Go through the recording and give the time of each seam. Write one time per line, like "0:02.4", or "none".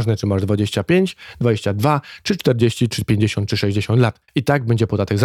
0:04.3